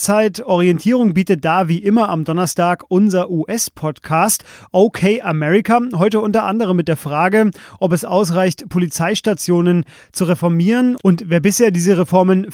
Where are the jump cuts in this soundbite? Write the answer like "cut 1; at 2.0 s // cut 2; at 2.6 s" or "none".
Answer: none